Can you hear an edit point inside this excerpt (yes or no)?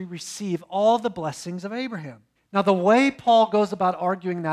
yes